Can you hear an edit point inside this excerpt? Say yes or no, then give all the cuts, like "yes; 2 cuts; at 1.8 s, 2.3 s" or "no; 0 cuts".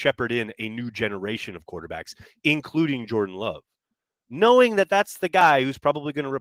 no; 0 cuts